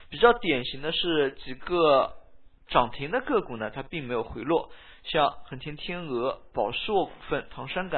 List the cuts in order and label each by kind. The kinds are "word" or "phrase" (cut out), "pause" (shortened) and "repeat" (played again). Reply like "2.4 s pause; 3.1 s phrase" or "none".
2.6 s pause